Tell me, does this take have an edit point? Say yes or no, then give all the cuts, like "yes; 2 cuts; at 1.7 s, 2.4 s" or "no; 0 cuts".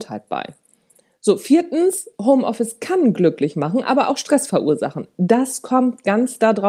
no; 0 cuts